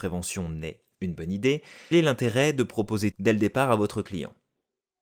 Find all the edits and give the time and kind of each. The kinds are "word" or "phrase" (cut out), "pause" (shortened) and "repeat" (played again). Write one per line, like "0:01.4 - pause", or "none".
0:00.9 - word
0:01.9 - word
0:03.1 - word